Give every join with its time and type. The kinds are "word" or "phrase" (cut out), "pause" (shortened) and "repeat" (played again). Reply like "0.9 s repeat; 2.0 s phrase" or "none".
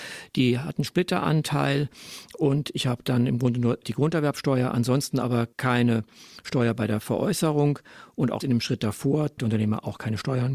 3.8 s word; 5.5 s pause; 8.4 s word; 9.4 s word